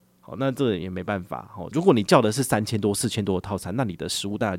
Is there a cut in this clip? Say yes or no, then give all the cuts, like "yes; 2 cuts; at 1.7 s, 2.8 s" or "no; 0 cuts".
yes; 1 cut; at 1.7 s